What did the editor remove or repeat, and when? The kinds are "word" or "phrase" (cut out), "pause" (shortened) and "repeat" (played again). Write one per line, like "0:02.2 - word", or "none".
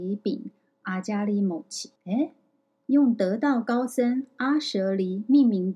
0:02.0 - pause